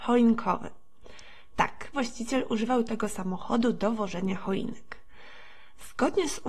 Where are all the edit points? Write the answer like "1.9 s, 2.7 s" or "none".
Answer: 1.9 s